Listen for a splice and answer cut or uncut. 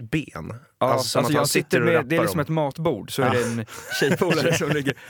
uncut